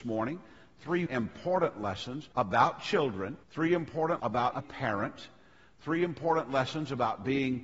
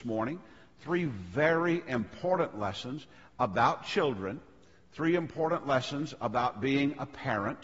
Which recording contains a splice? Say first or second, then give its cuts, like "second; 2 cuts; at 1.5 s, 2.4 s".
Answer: first; 5 cuts; at 1.1 s, 2.3 s, 3.4 s, 4.2 s, 4.5 s